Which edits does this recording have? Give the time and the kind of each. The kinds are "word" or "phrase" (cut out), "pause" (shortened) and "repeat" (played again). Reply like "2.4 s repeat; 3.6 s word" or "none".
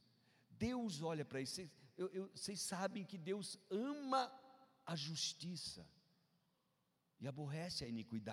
none